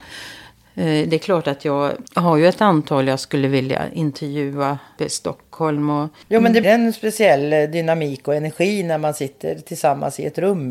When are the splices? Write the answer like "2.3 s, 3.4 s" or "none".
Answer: 2.1 s, 5.0 s, 6.6 s